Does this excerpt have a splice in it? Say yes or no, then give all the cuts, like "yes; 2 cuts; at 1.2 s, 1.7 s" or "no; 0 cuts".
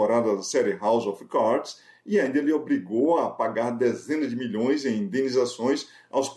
no; 0 cuts